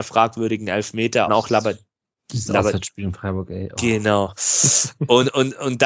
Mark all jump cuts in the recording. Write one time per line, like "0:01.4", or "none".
0:01.3